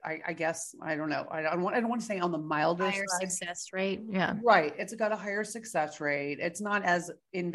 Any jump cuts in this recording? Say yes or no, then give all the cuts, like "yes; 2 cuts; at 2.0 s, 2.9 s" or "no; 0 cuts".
no; 0 cuts